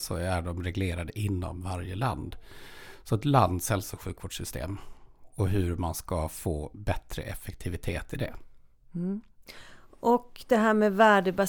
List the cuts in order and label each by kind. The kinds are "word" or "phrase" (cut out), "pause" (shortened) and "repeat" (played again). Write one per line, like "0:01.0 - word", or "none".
none